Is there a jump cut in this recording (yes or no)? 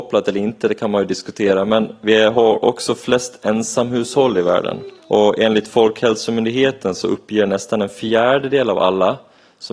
yes